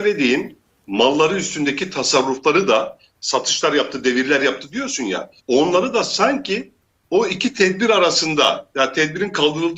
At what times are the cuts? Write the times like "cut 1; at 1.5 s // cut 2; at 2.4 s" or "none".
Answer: cut 1; at 5.4 s